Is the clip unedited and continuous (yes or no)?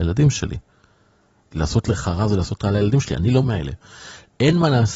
no